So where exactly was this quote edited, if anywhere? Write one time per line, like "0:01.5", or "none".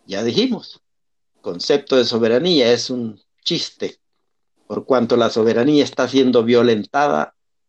none